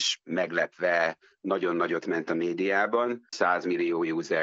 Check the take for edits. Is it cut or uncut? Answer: cut